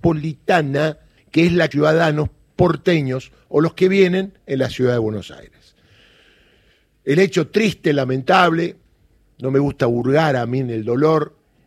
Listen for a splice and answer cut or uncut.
cut